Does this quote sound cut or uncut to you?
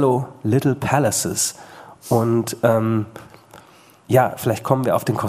uncut